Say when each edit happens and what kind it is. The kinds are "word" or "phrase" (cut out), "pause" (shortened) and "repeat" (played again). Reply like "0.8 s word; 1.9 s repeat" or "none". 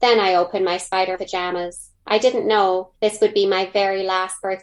1.2 s word; 2.0 s pause; 2.9 s pause